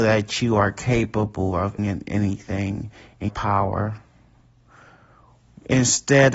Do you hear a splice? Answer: yes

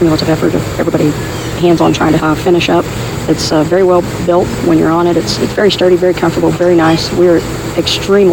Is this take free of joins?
no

